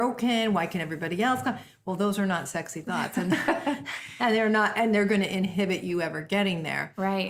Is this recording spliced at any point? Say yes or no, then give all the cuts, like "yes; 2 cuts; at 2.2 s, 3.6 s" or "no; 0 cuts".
no; 0 cuts